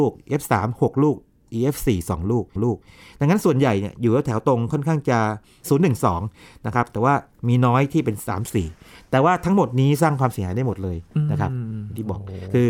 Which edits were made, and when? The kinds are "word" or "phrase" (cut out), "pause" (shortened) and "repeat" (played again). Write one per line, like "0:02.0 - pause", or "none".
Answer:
0:02.6 - repeat